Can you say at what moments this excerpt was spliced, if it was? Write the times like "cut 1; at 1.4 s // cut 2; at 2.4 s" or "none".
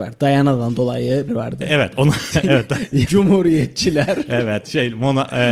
cut 1; at 1.3 s // cut 2; at 3.1 s